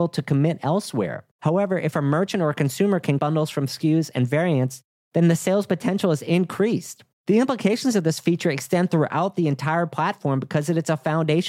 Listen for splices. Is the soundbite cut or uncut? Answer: cut